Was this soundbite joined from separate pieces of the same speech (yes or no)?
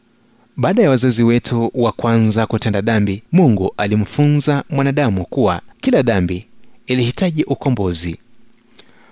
yes